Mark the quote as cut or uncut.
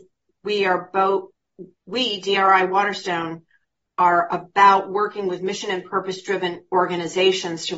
uncut